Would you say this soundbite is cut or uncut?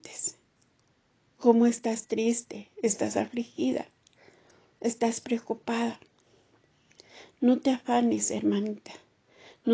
uncut